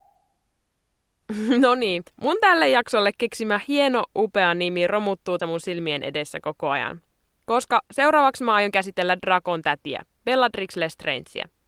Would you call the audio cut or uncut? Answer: cut